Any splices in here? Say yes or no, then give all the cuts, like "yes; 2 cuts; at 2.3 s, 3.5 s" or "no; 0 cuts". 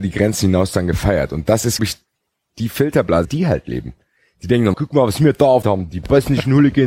yes; 4 cuts; at 1.8 s, 3.2 s, 4.7 s, 5.6 s